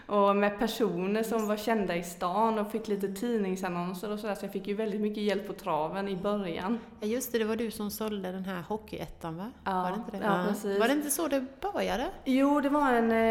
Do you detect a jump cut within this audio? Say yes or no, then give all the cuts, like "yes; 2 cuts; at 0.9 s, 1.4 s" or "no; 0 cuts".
no; 0 cuts